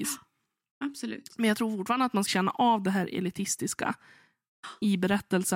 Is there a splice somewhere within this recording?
yes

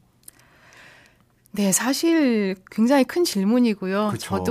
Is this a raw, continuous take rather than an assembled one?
yes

